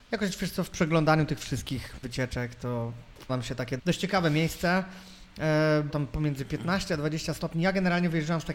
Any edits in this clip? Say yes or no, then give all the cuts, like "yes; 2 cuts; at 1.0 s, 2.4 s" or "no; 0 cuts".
yes; 4 cuts; at 2.0 s, 3.3 s, 3.8 s, 5.9 s